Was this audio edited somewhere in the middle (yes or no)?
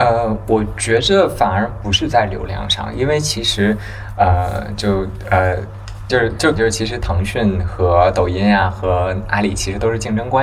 yes